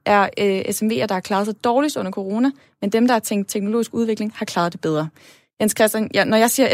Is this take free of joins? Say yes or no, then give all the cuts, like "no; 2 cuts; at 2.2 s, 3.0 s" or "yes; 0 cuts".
yes; 0 cuts